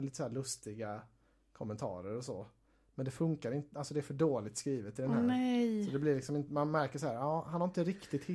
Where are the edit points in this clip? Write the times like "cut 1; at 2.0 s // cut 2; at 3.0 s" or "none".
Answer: none